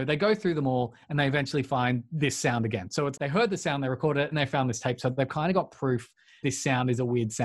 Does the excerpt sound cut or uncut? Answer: cut